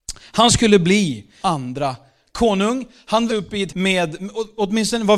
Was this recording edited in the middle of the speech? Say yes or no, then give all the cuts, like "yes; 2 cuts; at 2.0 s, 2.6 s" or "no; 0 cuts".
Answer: yes; 3 cuts; at 1.4 s, 3.3 s, 3.7 s